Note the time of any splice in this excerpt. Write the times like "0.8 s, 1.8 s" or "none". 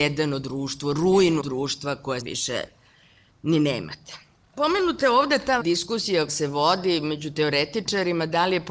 1.4 s, 2.2 s, 5.6 s, 6.3 s